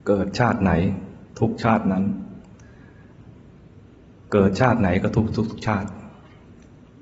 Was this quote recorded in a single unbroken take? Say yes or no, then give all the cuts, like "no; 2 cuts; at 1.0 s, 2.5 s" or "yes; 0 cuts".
yes; 0 cuts